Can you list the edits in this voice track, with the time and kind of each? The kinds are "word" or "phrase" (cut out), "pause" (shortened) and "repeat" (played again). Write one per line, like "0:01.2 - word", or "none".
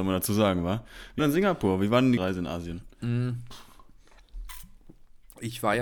0:01.2 - word
0:02.2 - word